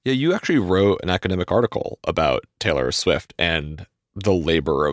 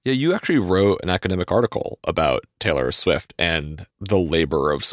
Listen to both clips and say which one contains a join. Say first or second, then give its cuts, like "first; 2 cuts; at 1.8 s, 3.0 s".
second; 1 cut; at 3.9 s